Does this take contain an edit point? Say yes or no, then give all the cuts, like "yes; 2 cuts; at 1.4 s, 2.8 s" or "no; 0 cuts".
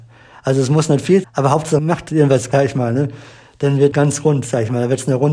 yes; 4 cuts; at 1.2 s, 1.8 s, 2.5 s, 3.9 s